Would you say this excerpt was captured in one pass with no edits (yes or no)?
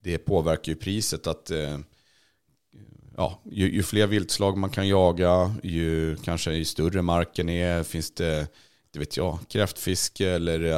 yes